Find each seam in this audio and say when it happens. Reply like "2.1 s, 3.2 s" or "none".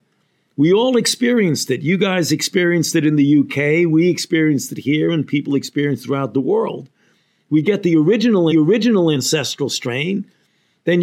8.5 s